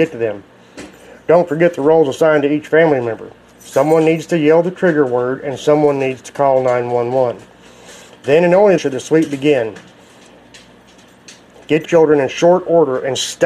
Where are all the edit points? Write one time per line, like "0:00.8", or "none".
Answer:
0:08.8
0:11.8